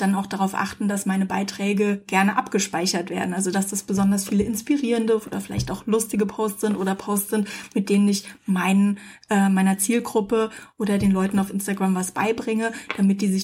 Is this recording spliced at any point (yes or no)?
no